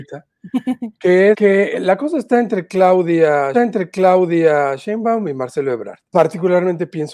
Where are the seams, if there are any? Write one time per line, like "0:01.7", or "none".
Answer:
0:01.3
0:03.5
0:06.1